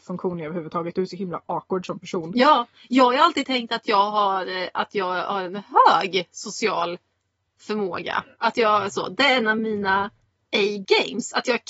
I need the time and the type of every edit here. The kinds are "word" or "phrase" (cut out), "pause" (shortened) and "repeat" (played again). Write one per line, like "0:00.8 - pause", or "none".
none